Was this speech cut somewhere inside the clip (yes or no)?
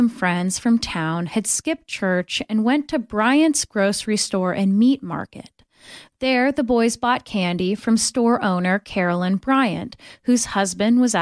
no